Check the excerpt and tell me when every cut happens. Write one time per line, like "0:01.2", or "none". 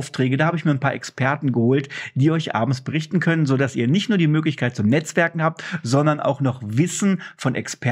none